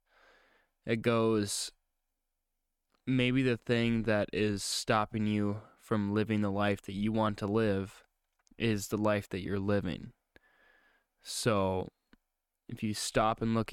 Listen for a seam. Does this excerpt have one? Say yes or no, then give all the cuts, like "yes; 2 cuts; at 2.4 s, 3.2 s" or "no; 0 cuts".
no; 0 cuts